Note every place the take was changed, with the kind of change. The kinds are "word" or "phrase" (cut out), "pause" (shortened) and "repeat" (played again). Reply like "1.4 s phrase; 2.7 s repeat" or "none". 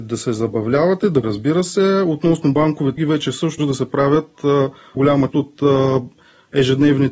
1.2 s word; 3.0 s word; 3.6 s word; 5.0 s word; 5.3 s word